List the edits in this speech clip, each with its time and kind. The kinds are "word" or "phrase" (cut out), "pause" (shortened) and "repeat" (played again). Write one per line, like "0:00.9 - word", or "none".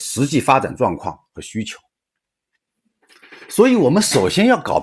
none